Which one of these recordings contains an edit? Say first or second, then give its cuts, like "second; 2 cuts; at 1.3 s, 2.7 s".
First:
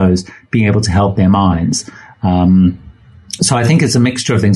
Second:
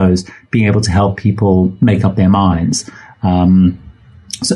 first; 2 cuts; at 1.2 s, 3.4 s